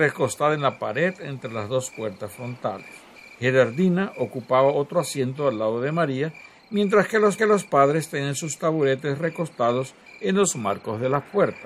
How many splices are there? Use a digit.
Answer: 1